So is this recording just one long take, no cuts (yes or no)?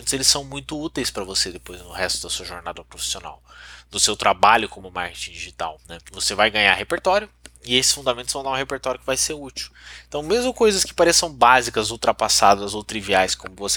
no